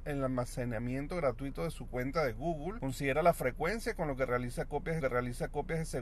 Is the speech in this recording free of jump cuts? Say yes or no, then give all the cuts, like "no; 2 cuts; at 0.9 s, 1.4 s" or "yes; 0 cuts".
no; 1 cut; at 5.0 s